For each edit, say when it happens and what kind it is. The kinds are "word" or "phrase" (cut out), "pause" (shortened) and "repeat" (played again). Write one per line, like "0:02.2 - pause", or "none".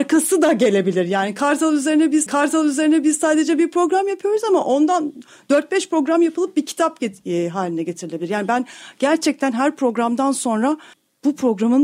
0:02.3 - repeat
0:10.9 - pause